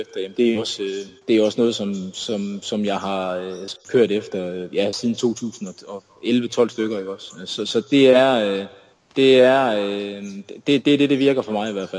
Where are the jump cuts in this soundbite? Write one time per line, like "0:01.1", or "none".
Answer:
0:01.2
0:03.8
0:08.9